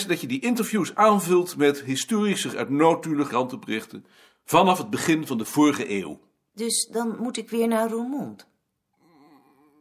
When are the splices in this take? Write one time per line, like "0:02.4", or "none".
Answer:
0:02.5
0:03.3